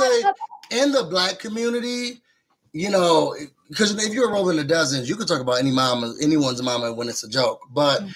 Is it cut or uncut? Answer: uncut